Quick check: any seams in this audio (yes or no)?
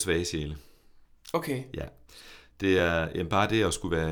no